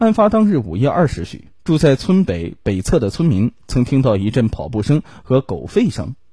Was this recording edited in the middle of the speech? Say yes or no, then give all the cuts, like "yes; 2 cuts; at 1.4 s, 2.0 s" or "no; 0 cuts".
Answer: yes; 1 cut; at 1.5 s